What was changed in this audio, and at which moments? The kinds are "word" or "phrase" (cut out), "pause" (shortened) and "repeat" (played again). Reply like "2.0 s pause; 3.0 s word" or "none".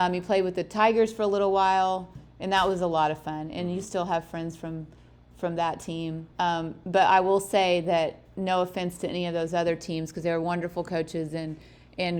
6.3 s pause